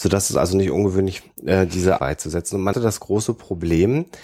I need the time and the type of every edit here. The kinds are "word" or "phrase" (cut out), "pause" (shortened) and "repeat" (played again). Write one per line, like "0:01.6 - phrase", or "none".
0:01.2 - word
0:02.0 - phrase
0:02.7 - word